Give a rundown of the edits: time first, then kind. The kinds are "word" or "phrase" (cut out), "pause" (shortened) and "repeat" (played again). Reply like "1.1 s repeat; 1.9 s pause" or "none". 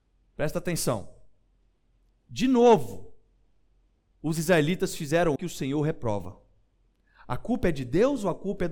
5.4 s word